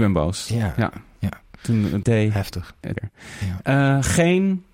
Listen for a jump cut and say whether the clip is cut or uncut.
cut